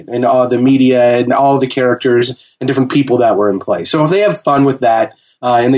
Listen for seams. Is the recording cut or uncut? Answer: uncut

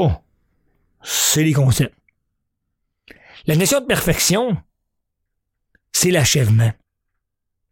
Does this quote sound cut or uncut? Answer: uncut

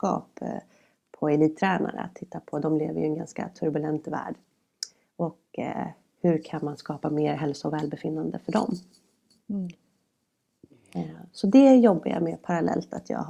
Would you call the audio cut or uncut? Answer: uncut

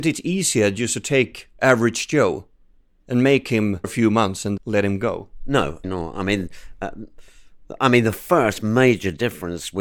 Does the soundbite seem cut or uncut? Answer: cut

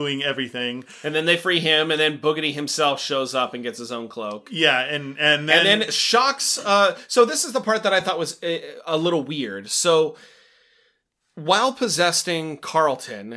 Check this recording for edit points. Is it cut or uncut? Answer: uncut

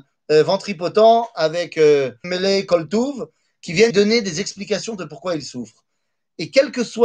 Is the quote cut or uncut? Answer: cut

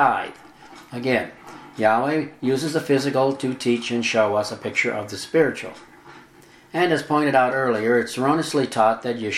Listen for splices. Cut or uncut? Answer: uncut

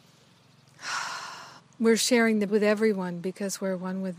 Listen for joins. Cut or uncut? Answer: cut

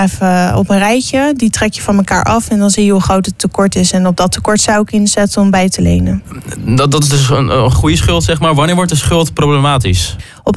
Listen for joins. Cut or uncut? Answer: cut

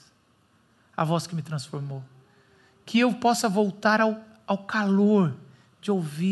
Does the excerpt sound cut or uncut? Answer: uncut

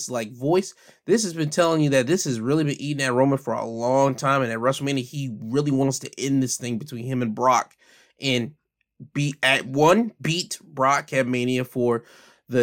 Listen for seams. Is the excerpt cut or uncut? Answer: uncut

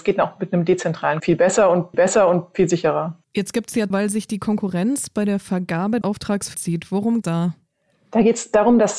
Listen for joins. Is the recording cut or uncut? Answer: cut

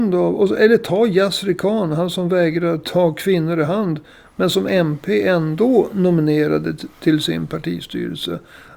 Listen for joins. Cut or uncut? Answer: uncut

